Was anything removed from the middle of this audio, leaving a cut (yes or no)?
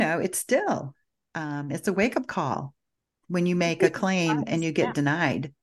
no